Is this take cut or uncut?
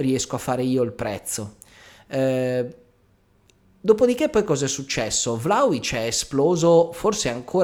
uncut